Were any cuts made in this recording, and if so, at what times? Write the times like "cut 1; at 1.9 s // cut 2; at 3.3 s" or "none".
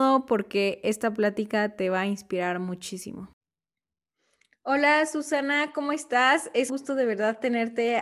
cut 1; at 6.7 s